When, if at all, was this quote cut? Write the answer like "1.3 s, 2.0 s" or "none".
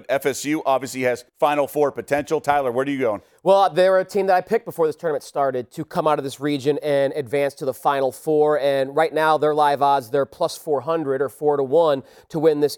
1.3 s